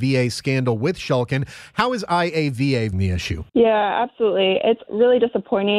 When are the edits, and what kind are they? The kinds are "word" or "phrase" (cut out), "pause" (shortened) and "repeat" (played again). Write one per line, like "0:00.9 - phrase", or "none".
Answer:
0:02.9 - word
0:03.5 - pause
0:04.9 - word

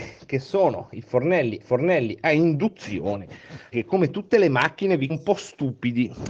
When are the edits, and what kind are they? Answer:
0:01.6 - repeat
0:03.7 - word
0:05.1 - word

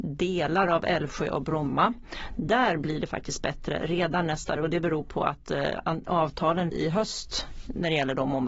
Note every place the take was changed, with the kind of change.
0:04.6 - word
0:06.7 - phrase

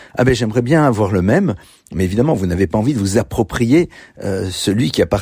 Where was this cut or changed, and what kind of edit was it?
none

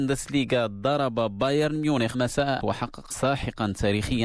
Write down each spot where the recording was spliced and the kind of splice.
0:02.1 - word
0:02.6 - word
0:03.1 - word

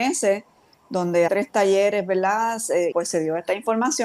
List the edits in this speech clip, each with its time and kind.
0:01.3 - phrase
0:02.9 - word

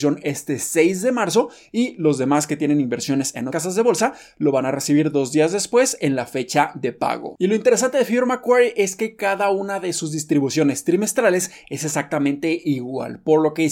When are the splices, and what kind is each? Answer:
0:03.5 - word

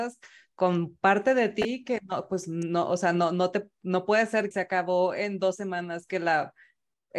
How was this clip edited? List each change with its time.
0:04.5 - word

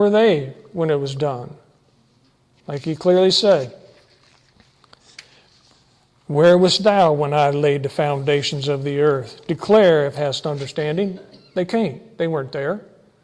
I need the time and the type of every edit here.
0:10.1 - word

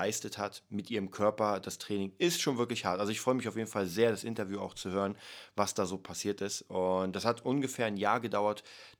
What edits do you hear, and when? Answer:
none

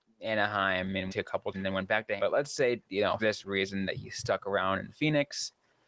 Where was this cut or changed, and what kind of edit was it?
0:01.1 - word
0:01.5 - word
0:02.2 - word
0:03.2 - word

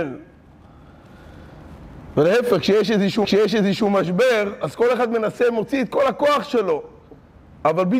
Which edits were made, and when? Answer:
0:03.2 - repeat

